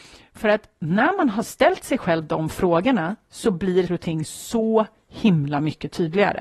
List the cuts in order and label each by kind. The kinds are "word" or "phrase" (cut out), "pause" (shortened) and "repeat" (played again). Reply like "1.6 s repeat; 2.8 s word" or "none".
3.9 s word